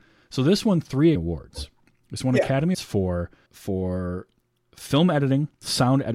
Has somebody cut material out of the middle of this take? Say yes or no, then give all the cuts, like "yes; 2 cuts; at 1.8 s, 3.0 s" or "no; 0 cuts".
yes; 3 cuts; at 1.1 s, 2.7 s, 3.5 s